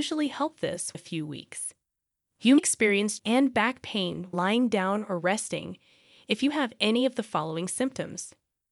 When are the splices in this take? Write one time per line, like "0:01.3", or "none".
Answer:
0:00.9
0:02.6
0:03.2
0:04.3

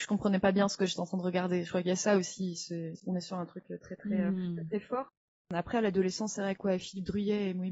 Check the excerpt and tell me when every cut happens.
none

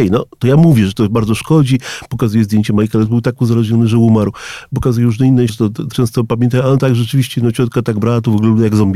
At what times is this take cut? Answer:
0:03.1
0:05.5
0:05.9

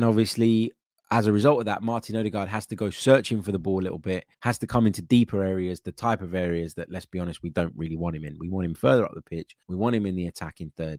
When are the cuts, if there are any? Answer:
0:04.3
0:09.6

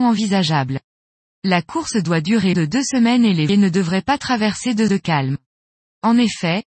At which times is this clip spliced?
0:02.5
0:03.5
0:04.9

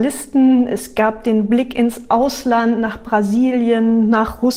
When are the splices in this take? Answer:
none

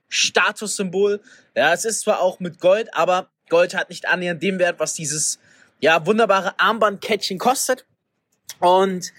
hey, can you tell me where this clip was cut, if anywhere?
none

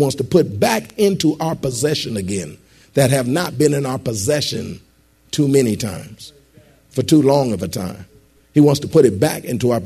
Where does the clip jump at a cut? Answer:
none

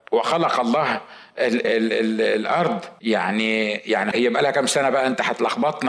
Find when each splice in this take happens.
0:01.6
0:03.0
0:04.1

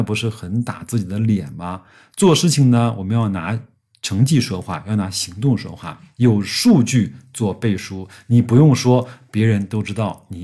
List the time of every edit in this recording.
none

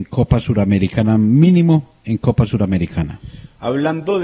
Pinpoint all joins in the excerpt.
none

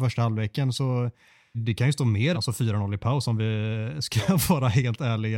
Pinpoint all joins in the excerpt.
0:01.5
0:02.3

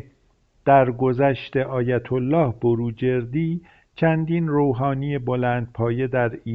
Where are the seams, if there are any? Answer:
none

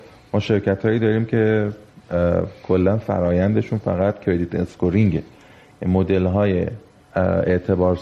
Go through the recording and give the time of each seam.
none

